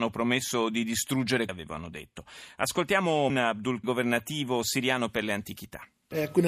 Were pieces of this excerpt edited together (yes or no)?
yes